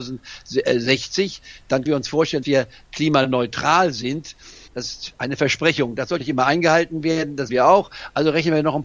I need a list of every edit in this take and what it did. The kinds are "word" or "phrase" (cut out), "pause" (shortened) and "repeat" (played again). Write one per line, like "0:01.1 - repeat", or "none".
0:01.9 - word
0:02.4 - word
0:04.7 - word
0:06.2 - word
0:07.5 - word